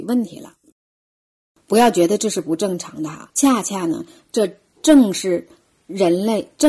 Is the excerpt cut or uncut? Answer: cut